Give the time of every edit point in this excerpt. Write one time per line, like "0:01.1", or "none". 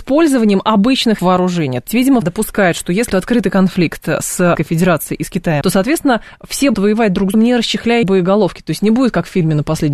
0:01.2
0:01.9
0:02.2
0:03.1
0:04.5
0:05.6
0:06.7
0:07.3
0:08.0